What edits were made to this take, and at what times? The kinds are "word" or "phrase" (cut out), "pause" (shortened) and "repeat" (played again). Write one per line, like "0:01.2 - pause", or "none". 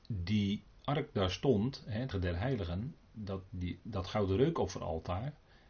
0:02.1 - word
0:03.0 - word